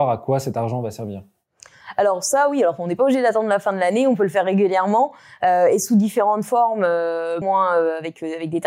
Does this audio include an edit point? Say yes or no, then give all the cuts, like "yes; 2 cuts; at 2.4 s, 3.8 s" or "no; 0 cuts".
yes; 1 cut; at 7.4 s